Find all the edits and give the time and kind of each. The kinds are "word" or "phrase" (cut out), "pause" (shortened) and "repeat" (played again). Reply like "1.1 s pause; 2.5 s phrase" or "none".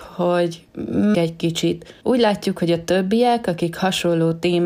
1.1 s word